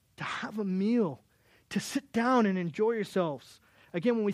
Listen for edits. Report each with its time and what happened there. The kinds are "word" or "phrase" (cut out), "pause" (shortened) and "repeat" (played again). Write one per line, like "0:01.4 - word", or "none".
none